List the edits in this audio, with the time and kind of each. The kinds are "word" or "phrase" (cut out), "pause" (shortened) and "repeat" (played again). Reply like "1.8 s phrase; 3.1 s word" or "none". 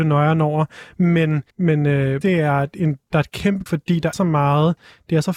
1.5 s pause; 2.2 s phrase; 3.7 s word; 4.1 s word